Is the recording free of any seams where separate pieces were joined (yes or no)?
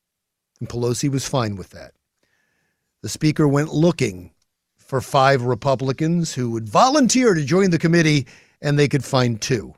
yes